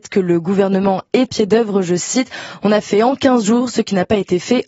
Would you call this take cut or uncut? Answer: cut